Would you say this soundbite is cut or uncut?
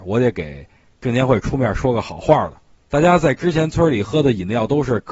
uncut